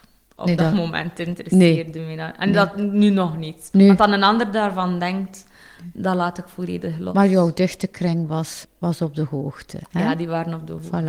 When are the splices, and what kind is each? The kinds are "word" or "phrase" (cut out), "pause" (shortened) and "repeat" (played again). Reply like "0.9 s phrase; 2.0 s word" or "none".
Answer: none